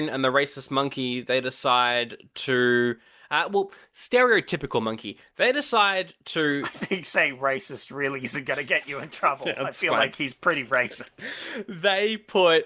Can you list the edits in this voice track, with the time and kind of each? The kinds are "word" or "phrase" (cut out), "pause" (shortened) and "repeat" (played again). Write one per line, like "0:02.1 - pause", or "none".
none